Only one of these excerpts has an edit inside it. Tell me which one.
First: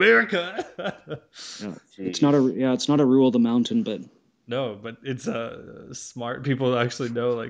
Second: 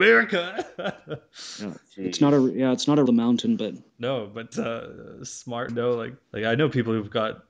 second; 5 cuts; at 3.1 s, 3.9 s, 4.5 s, 5.7 s, 6.2 s

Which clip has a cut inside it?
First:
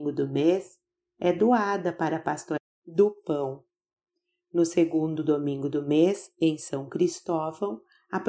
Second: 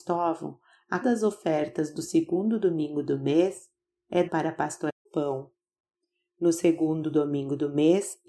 second; 3 cuts; at 1.0 s, 4.3 s, 5.1 s

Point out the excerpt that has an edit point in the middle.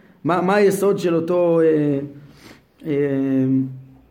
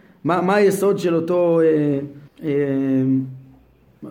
second; 1 cut; at 2.3 s

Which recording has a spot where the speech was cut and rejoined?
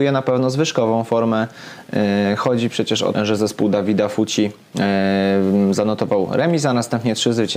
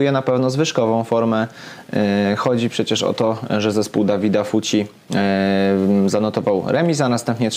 first; 1 cut; at 3.1 s

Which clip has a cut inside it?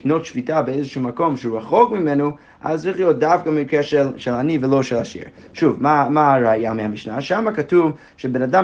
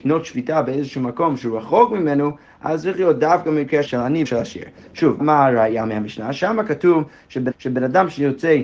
second; 4 cuts; at 3.9 s, 4.3 s, 5.2 s, 7.5 s

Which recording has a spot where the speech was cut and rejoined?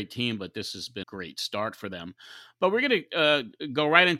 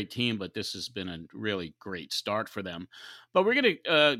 first; 1 cut; at 1.0 s

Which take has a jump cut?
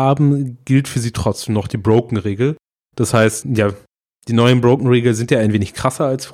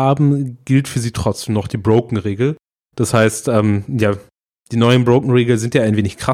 first; 1 cut; at 3.4 s

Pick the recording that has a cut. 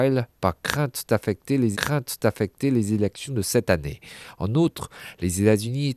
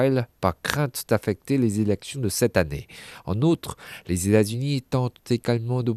first; 1 cut; at 1.7 s

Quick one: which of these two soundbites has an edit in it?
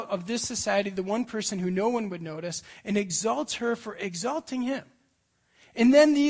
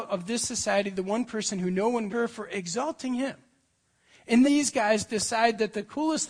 second; 2 cuts; at 2.1 s, 4.4 s

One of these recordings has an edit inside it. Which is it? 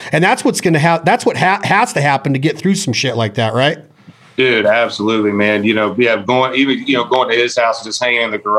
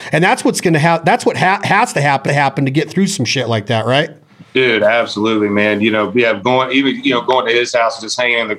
second; 2 cuts; at 2.3 s, 4.5 s

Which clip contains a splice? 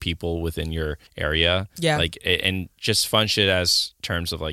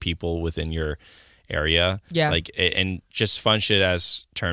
first; 1 cut; at 1.1 s

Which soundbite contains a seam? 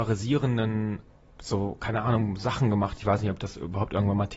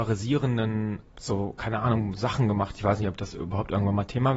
second; 1 cut; at 1.1 s

